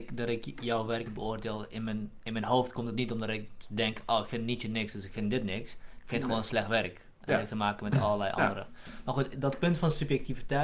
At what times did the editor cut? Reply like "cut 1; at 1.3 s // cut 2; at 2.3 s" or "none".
cut 1; at 1.1 s // cut 2; at 9.3 s